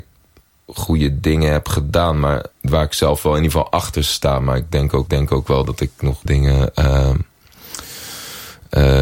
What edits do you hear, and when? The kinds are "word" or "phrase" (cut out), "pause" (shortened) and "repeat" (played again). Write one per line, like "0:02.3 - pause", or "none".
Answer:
0:02.5 - pause
0:05.1 - repeat
0:06.3 - word

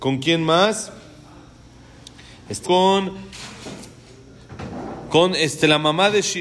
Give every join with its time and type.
0:02.6 - word

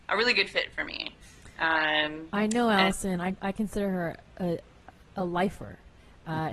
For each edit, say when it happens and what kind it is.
none

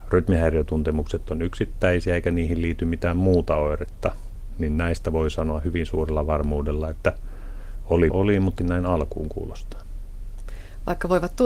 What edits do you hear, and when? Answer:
0:08.1 - word
0:08.6 - phrase

